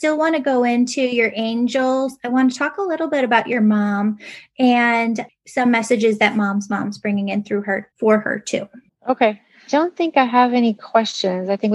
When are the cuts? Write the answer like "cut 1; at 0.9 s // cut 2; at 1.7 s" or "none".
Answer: cut 1; at 7.9 s // cut 2; at 8.9 s

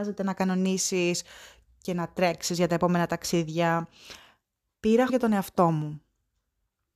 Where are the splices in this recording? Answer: cut 1; at 5.1 s

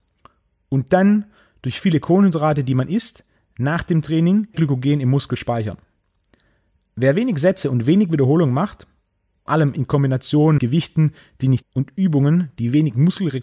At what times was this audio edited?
cut 1; at 4.5 s // cut 2; at 9.5 s // cut 3; at 10.6 s // cut 4; at 11.6 s

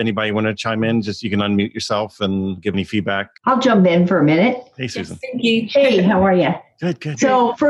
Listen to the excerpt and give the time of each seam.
cut 1; at 3.4 s

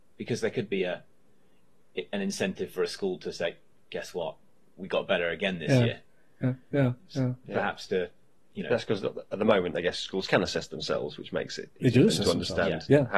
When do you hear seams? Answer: none

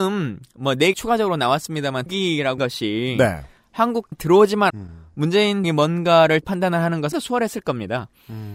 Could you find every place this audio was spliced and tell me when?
cut 1; at 0.9 s // cut 2; at 2.1 s // cut 3; at 2.6 s // cut 4; at 4.1 s // cut 5; at 4.7 s // cut 6; at 5.6 s // cut 7; at 6.4 s // cut 8; at 7.1 s

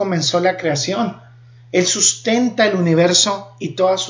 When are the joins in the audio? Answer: none

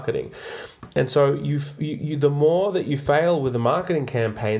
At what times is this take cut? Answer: none

